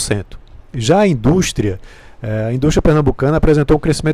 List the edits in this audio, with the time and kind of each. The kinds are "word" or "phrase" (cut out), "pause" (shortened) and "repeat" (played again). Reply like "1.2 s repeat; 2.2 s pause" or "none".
none